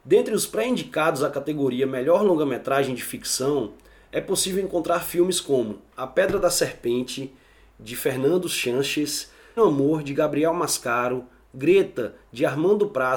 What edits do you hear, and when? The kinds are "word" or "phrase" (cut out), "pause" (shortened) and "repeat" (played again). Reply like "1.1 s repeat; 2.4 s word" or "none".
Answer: 9.6 s word